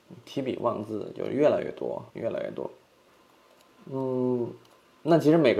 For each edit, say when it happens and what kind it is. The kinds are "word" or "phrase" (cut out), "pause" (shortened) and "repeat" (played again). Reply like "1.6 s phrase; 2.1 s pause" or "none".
2.1 s pause; 3.1 s pause